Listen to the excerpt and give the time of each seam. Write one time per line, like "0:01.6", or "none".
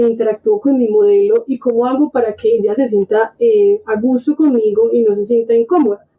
none